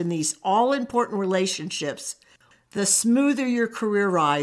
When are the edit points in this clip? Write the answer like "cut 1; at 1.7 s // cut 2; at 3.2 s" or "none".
none